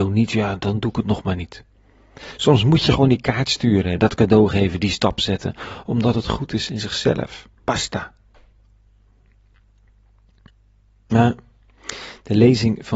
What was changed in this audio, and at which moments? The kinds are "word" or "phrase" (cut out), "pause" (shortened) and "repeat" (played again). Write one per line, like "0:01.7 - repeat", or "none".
0:07.5 - pause